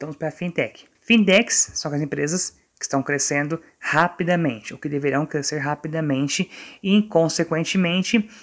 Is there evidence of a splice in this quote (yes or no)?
yes